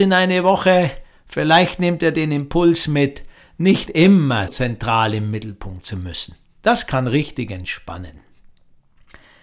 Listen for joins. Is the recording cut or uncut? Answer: cut